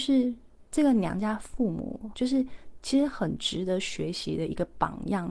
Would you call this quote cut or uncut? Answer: cut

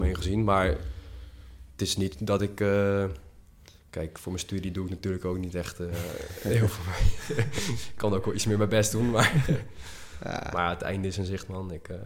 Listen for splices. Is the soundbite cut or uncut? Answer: uncut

